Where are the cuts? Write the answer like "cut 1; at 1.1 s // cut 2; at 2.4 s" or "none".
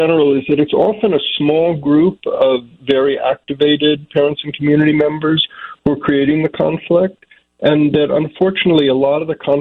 none